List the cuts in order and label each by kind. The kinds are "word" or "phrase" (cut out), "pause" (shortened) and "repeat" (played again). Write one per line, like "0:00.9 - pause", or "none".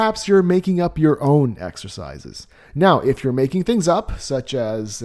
none